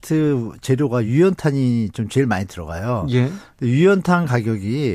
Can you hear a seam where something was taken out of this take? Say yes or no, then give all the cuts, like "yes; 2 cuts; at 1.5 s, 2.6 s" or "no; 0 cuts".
no; 0 cuts